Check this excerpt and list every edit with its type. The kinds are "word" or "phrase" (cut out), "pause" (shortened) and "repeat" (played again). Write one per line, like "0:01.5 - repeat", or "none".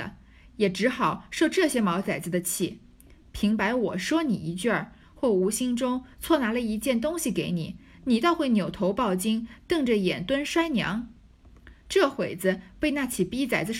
none